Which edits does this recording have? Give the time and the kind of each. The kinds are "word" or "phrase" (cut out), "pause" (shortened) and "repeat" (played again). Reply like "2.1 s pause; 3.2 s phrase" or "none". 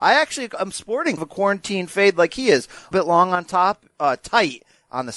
1.2 s word; 2.9 s word